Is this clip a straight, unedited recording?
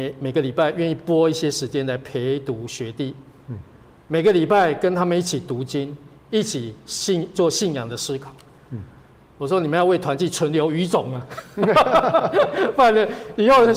yes; 0 cuts

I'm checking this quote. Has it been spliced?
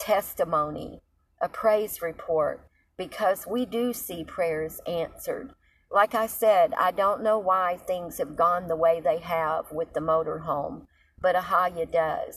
no; 0 cuts

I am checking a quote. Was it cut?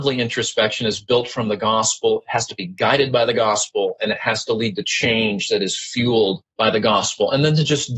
yes; 1 cut; at 6.5 s

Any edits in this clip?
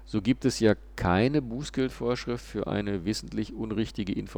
no; 0 cuts

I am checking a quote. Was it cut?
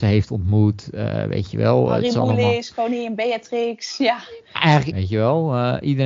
yes; 1 cut; at 4.9 s

